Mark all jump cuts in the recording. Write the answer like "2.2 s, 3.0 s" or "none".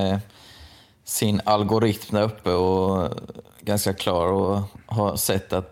3.5 s